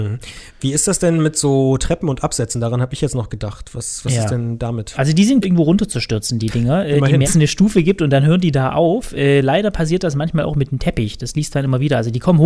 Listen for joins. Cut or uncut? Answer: cut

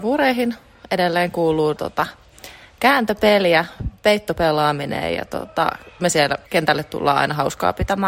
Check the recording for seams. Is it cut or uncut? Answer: cut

